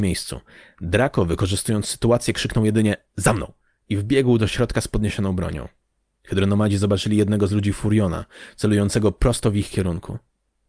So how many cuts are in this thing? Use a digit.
0